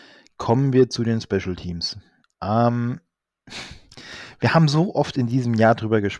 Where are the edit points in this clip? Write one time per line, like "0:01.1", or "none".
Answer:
0:02.2